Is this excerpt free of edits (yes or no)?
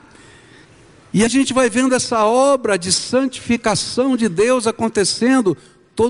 no